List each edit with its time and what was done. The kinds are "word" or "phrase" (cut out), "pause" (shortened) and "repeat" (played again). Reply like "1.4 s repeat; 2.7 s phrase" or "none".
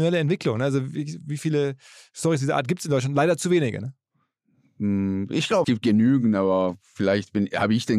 5.6 s word